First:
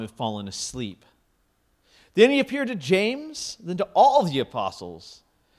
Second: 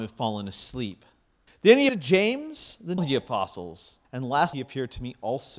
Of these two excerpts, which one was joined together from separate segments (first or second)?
second